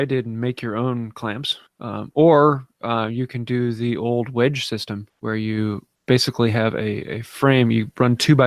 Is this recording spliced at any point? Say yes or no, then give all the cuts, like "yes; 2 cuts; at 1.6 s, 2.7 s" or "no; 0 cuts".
no; 0 cuts